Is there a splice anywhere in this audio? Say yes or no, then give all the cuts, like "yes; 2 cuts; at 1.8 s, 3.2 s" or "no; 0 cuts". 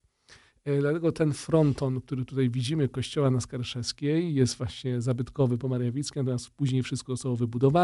no; 0 cuts